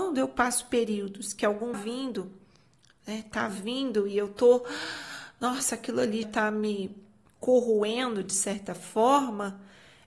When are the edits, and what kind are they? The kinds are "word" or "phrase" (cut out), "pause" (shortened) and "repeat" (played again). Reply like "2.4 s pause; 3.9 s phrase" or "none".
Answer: 1.7 s phrase; 6.2 s word